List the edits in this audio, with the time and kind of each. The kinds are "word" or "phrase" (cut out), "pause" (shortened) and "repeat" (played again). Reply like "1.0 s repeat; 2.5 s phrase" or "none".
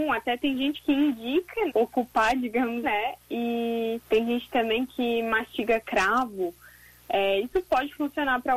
1.7 s phrase; 2.8 s word; 4.0 s pause